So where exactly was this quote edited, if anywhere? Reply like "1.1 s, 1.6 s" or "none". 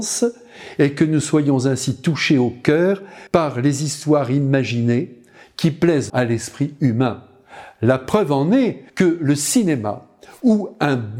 3.3 s, 6.1 s, 8.9 s